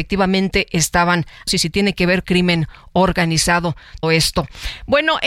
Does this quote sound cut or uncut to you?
cut